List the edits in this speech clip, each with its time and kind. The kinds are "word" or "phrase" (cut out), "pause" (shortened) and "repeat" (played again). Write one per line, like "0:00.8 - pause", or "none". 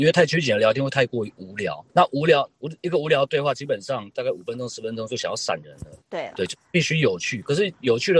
0:01.9 - pause
0:06.0 - pause